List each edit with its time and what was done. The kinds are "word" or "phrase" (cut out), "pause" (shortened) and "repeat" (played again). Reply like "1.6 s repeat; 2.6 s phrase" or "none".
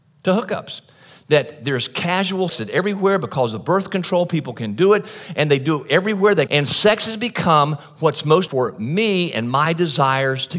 2.5 s word; 6.5 s word; 8.5 s word